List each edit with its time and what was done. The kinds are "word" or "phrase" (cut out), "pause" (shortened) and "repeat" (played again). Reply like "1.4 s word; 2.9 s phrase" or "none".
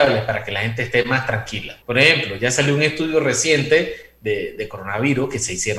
1.8 s pause